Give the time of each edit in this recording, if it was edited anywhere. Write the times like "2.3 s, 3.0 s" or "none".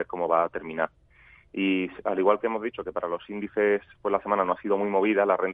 none